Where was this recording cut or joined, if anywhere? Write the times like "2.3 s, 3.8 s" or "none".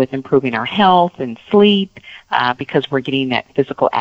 none